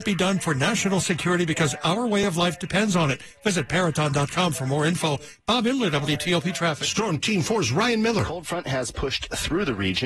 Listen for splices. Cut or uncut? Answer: uncut